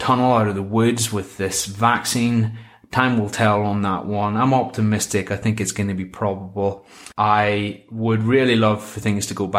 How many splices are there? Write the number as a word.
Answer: one